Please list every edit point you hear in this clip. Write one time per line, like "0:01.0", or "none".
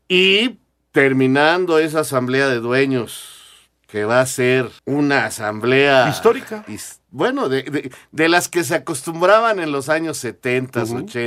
0:04.8